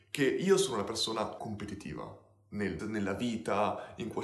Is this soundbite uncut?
no; 2 cuts; at 1.4 s, 2.8 s

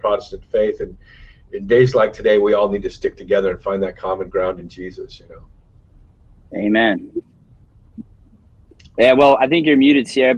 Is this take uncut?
yes; 0 cuts

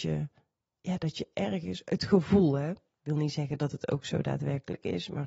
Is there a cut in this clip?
no; 0 cuts

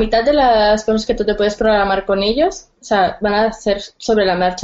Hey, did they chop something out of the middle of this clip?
no; 0 cuts

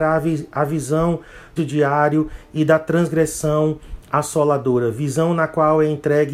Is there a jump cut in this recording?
yes; 1 cut; at 1.6 s

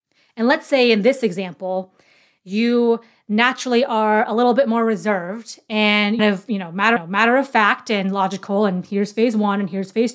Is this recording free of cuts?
no; 2 cuts; at 6.2 s, 7.0 s

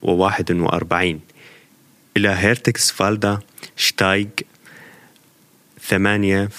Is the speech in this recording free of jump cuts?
yes; 0 cuts

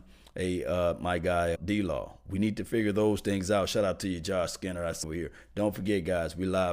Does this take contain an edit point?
yes; 2 cuts; at 1.6 s, 5.0 s

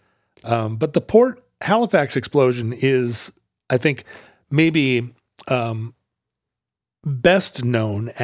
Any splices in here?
no; 0 cuts

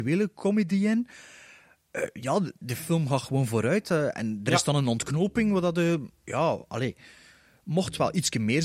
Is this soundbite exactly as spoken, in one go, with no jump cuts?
yes; 0 cuts

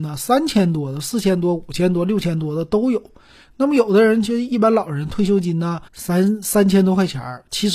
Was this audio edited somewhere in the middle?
yes; 1 cut; at 5.9 s

